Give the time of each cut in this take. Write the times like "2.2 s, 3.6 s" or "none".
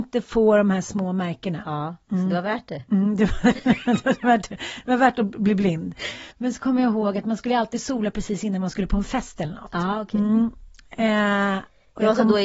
6.3 s